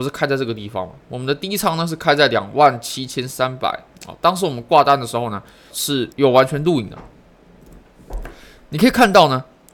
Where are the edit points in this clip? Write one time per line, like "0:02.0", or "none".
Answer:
0:05.7
0:06.1